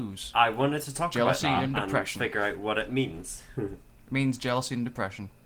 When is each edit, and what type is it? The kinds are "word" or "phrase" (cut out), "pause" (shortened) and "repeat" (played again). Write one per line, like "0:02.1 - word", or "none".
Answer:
none